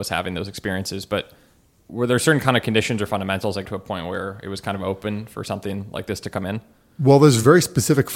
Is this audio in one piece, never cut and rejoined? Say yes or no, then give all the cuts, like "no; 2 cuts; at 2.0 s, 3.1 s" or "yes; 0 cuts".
no; 1 cut; at 3.7 s